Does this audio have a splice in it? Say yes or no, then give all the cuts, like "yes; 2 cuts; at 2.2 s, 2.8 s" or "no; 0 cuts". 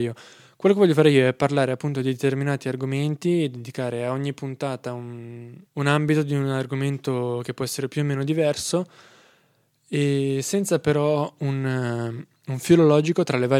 yes; 1 cut; at 5.6 s